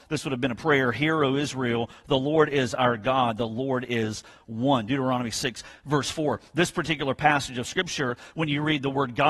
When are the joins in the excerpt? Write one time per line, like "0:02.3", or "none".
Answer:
none